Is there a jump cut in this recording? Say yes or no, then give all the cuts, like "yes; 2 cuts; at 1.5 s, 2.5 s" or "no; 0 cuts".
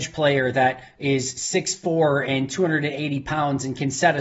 no; 0 cuts